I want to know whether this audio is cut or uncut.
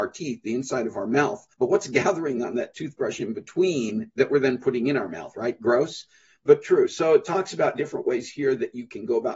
cut